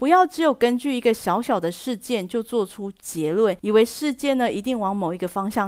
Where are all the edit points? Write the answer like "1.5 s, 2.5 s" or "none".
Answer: 3.6 s